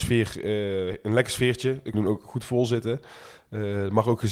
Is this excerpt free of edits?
no; 1 cut; at 1.9 s

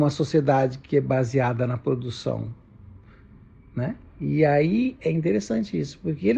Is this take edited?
no; 0 cuts

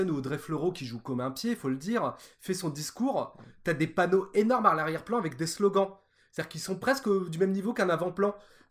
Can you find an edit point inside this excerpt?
no; 0 cuts

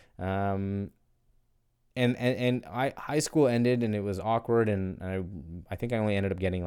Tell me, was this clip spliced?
no; 0 cuts

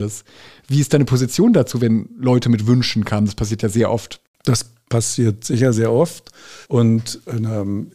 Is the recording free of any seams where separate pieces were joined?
no; 1 cut; at 6.6 s

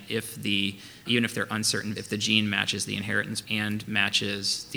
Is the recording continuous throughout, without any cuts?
no; 3 cuts; at 1.1 s, 2.0 s, 3.4 s

